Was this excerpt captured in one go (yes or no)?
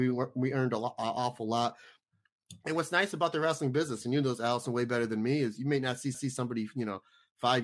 no